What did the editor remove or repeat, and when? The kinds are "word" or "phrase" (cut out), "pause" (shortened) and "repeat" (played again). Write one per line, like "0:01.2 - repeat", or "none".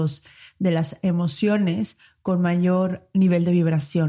none